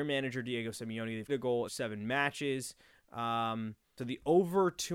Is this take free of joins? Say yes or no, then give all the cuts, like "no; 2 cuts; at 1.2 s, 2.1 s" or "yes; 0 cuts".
no; 3 cuts; at 1.3 s, 1.7 s, 4.0 s